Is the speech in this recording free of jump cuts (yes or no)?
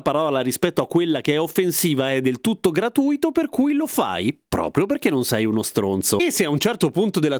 yes